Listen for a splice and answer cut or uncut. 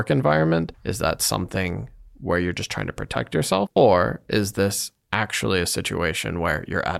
uncut